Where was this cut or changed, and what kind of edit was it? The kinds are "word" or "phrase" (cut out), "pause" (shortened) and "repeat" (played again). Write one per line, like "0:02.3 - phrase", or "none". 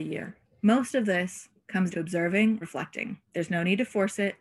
0:01.9 - word
0:02.6 - word
0:03.2 - pause